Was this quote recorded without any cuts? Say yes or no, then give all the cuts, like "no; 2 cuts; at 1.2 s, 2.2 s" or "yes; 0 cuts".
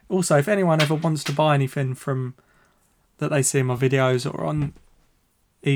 yes; 0 cuts